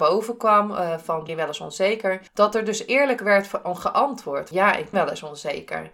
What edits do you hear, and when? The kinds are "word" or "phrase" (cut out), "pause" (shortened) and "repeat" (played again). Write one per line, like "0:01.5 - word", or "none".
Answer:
0:01.3 - word
0:02.3 - pause
0:04.5 - word
0:04.9 - word